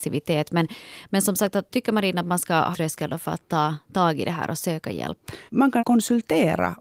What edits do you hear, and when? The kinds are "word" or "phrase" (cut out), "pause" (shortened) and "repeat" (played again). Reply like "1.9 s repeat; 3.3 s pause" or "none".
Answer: 1.7 s word; 2.7 s phrase; 5.5 s pause; 5.8 s word